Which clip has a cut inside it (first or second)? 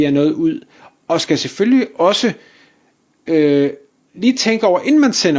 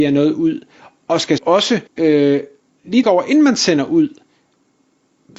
second